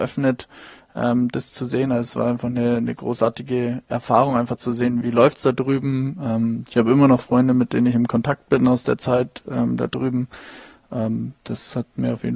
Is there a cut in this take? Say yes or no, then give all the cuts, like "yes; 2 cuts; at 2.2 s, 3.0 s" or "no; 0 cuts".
yes; 1 cut; at 5.0 s